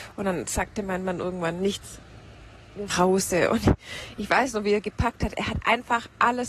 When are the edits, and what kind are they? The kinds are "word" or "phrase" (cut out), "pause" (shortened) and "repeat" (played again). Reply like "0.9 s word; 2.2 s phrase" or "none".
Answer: 2.9 s phrase